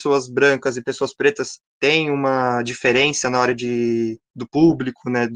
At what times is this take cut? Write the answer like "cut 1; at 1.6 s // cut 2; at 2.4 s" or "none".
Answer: cut 1; at 1.7 s